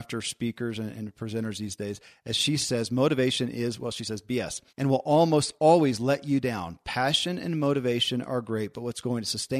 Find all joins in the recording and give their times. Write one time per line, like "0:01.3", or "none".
0:04.7

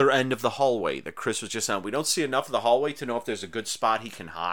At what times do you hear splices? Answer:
none

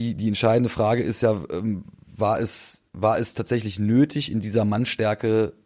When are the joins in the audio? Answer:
0:02.9

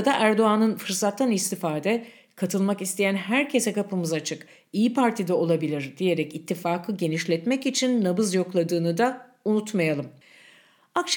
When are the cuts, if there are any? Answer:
none

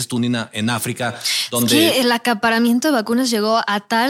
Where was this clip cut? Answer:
none

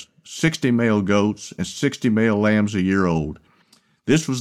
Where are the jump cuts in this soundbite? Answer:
none

